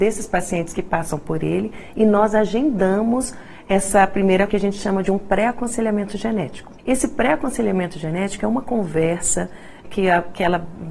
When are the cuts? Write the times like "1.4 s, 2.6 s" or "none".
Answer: 4.5 s, 6.8 s, 9.8 s